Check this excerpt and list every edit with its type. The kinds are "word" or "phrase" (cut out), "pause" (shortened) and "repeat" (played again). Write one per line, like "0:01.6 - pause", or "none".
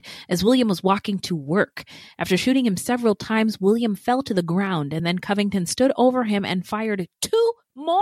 none